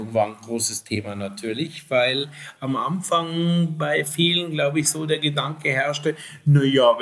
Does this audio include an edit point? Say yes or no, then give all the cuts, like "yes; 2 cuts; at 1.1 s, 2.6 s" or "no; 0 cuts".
no; 0 cuts